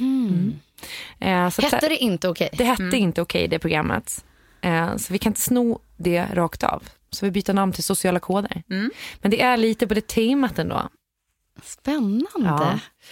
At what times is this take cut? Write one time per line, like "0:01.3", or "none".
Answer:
none